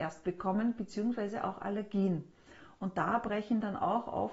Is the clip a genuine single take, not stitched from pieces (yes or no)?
yes